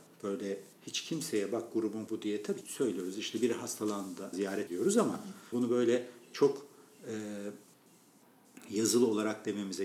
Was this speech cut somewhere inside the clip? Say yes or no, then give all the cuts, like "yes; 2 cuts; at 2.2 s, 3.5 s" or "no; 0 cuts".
yes; 5 cuts; at 2.1 s, 2.6 s, 4.3 s, 4.7 s, 5.5 s